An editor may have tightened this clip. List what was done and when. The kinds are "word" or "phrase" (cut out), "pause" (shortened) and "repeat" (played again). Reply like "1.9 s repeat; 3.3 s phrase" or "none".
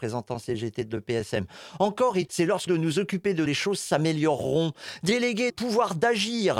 2.3 s word; 2.7 s phrase; 3.5 s phrase; 5.5 s word